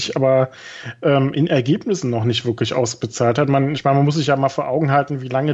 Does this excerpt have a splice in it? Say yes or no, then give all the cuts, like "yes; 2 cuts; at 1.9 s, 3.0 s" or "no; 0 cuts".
no; 0 cuts